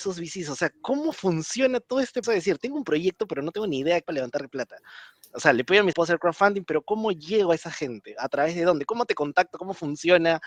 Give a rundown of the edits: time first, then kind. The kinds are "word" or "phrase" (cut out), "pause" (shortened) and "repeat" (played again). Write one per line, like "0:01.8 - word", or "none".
0:02.2 - word
0:04.0 - word
0:05.9 - word